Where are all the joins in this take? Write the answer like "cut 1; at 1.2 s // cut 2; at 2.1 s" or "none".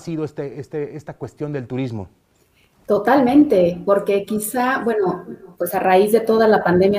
cut 1; at 5.5 s